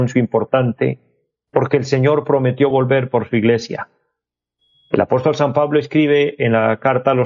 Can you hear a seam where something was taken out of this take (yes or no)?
no